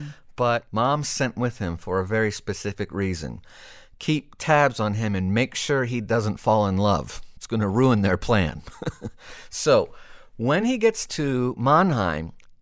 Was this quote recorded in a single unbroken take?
yes; 0 cuts

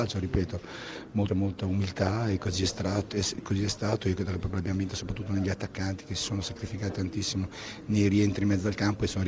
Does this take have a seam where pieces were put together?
yes; 1 cut; at 1.3 s

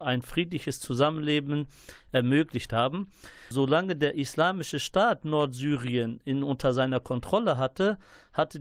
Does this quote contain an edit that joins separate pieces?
no; 0 cuts

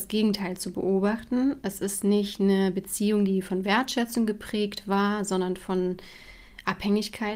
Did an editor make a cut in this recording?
no; 0 cuts

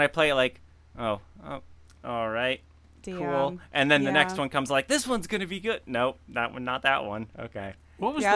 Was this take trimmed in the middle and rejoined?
no; 0 cuts

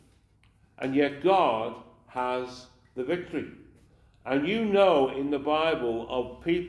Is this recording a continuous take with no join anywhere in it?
yes; 0 cuts

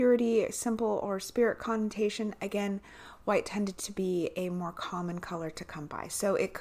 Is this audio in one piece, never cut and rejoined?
yes; 0 cuts

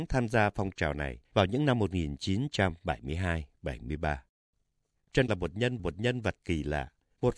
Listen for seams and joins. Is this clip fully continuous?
no; 3 cuts; at 1.2 s, 5.3 s, 5.8 s

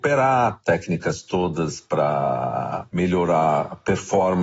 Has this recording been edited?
no; 0 cuts

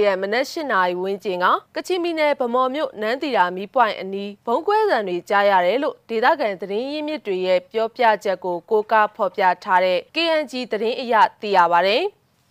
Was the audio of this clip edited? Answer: yes; 3 cuts; at 1.7 s, 4.4 s, 10.1 s

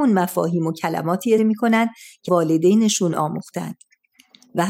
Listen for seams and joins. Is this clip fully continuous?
no; 2 cuts; at 1.4 s, 2.3 s

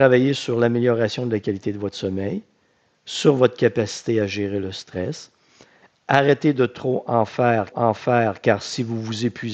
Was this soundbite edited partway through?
yes; 1 cut; at 7.7 s

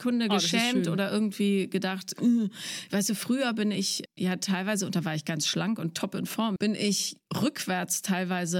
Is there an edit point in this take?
yes; 1 cut; at 6.6 s

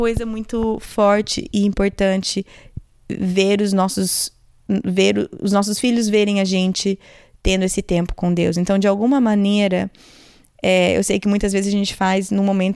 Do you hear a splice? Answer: no; 0 cuts

